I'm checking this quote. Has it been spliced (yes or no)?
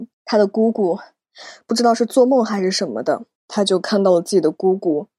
yes